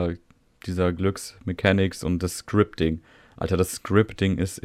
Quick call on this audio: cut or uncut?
uncut